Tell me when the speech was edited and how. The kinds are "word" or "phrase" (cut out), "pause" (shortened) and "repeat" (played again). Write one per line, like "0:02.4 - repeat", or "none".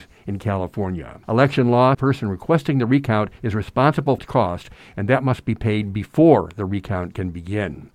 0:01.2 - pause
0:01.9 - phrase
0:03.4 - pause
0:04.2 - word